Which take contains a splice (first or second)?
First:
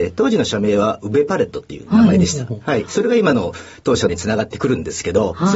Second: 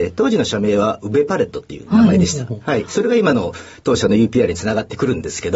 first